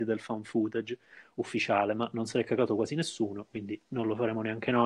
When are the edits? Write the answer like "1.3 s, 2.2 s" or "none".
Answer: none

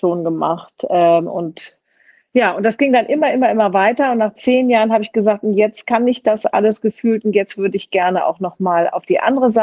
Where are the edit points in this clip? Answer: none

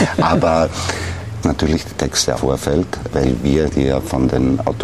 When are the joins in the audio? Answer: 1.4 s, 2.4 s, 3.1 s, 3.7 s

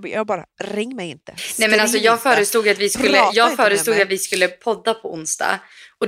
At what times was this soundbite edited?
none

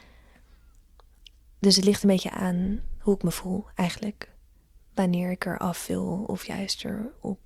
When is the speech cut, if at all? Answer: none

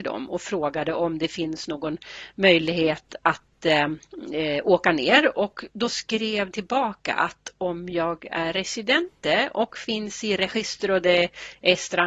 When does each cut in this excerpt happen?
6.5 s

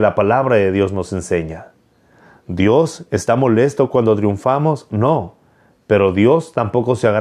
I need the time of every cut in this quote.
none

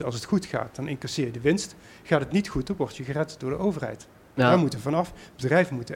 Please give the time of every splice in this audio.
none

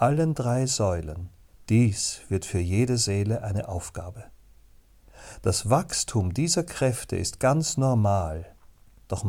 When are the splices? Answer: 1.5 s

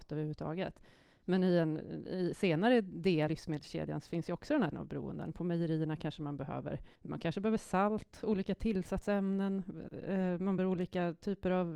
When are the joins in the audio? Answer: 3.3 s, 4.7 s, 7.0 s, 10.6 s

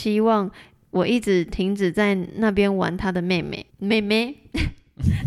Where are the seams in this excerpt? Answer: 3.7 s

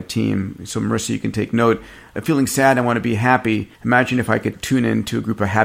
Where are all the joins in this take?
2.2 s, 3.8 s

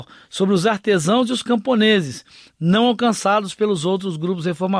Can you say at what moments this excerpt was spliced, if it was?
none

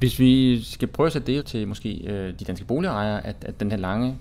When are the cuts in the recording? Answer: 1.4 s

